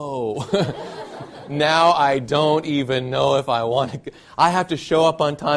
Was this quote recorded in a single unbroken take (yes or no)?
yes